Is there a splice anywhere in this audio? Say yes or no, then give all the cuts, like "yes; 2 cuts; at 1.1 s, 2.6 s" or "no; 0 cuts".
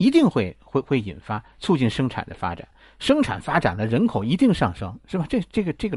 no; 0 cuts